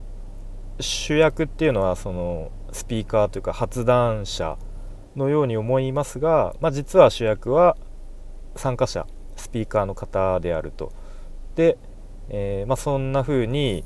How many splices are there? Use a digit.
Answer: 1